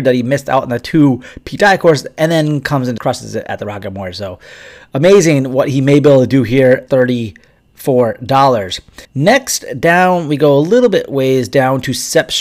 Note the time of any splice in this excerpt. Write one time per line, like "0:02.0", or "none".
0:03.0
0:06.9
0:09.0